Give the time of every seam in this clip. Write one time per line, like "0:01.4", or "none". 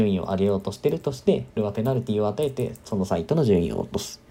0:01.6